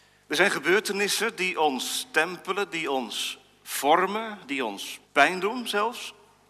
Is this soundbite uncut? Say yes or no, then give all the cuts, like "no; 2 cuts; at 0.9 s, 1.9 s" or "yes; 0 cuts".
no; 1 cut; at 5.0 s